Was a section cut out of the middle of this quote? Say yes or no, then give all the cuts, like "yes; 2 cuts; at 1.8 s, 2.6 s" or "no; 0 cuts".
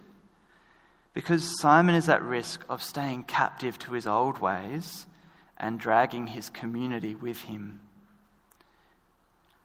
no; 0 cuts